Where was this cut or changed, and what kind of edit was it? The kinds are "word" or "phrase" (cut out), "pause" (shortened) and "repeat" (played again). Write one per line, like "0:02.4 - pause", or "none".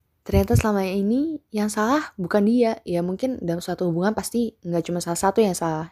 0:04.6 - pause